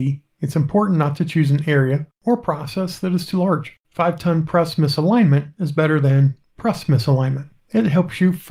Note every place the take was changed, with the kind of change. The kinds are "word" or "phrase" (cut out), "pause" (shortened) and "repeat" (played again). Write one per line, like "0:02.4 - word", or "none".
0:02.2 - pause
0:03.8 - pause
0:07.6 - pause